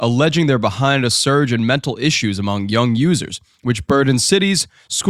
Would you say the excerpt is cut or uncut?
uncut